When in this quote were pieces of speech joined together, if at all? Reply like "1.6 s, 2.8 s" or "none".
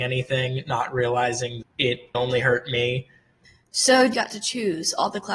1.6 s, 2.1 s, 3.4 s, 4.1 s